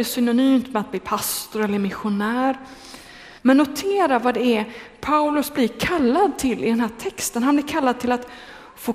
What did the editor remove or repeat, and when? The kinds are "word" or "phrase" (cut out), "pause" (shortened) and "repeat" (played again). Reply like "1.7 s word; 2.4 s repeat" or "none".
3.4 s pause